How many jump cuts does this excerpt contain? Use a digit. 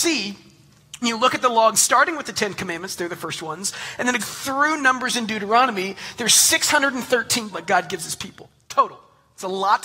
4